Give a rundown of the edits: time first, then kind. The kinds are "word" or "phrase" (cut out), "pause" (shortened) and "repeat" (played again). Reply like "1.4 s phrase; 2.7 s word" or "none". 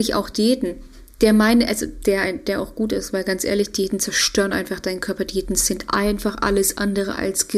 none